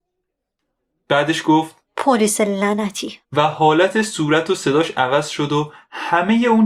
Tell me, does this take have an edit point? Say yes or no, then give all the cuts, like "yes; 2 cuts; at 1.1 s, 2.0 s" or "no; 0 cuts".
yes; 2 cuts; at 1.9 s, 3.2 s